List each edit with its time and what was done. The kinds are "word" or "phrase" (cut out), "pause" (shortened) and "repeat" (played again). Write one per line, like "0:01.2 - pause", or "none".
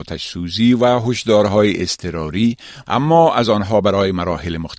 0:02.8 - phrase